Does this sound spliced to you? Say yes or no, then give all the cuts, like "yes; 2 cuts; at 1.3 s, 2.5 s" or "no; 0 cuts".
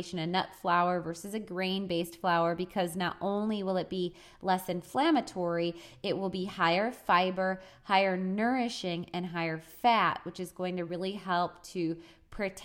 no; 0 cuts